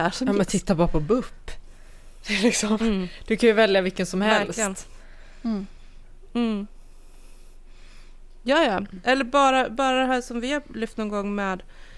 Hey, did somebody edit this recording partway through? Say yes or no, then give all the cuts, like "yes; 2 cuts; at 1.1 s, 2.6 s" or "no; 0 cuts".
no; 0 cuts